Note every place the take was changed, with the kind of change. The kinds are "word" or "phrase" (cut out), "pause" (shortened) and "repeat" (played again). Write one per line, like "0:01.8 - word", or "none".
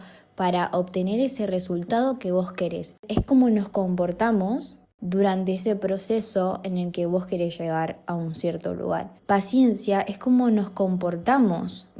0:04.8 - pause
0:09.2 - pause